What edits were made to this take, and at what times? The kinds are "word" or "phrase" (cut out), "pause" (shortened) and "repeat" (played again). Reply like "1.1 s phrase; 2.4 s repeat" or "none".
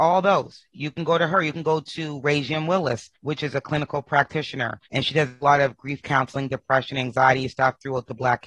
3.2 s pause; 4.9 s pause